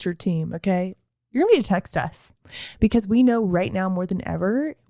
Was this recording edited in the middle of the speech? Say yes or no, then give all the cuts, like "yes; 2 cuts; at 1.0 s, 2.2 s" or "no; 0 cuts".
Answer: no; 0 cuts